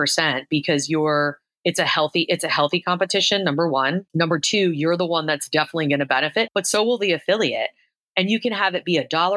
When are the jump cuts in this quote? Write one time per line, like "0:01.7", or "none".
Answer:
none